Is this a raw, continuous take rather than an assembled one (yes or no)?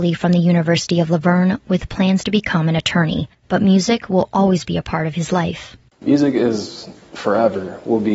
yes